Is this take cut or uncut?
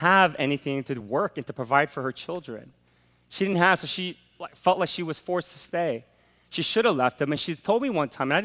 uncut